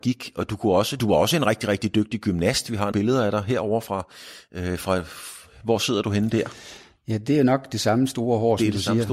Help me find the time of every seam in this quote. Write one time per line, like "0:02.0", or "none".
0:02.9